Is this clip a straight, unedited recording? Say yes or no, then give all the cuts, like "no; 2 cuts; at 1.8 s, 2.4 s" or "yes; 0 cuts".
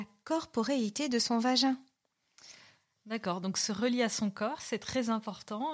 yes; 0 cuts